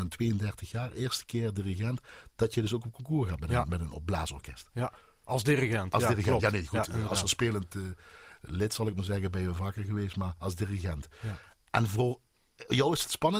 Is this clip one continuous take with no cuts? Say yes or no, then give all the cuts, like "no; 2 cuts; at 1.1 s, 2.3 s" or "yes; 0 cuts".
yes; 0 cuts